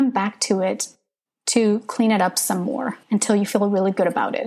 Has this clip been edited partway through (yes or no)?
yes